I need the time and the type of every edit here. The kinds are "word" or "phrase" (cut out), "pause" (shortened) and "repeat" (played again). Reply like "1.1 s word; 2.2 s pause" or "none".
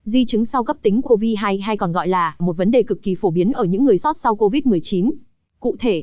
1.0 s phrase; 2.4 s phrase; 4.0 s word